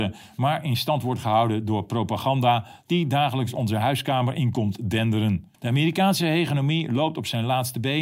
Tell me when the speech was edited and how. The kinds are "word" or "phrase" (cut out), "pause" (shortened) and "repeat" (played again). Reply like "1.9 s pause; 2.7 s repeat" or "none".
5.5 s pause